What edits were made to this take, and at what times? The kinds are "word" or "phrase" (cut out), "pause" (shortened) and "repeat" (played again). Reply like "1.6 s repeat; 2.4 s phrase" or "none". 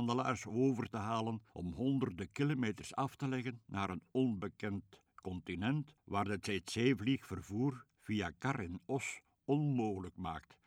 1.5 s pause